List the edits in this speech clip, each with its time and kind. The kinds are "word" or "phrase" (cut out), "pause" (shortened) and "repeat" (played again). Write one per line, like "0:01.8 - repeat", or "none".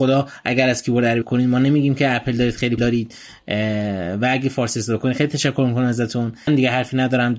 0:01.2 - word
0:02.8 - word
0:06.5 - word